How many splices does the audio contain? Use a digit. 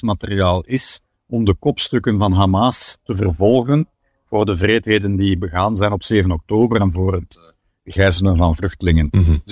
0